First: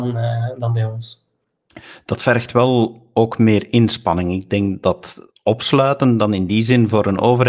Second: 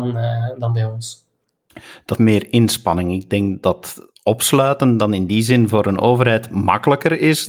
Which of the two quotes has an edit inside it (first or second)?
second